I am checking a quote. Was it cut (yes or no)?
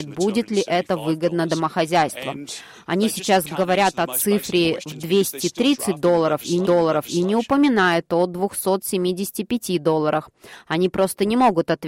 yes